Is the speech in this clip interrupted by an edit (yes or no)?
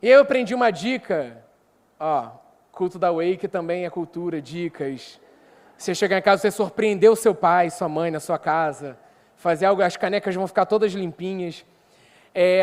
no